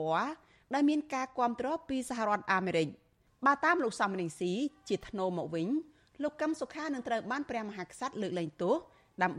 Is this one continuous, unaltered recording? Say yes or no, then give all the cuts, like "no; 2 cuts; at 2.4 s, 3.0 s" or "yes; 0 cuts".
yes; 0 cuts